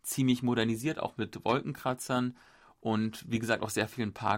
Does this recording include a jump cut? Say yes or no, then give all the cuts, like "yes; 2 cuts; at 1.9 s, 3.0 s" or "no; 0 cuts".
no; 0 cuts